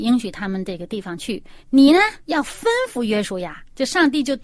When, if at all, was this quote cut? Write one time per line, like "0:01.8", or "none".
0:01.6
0:02.2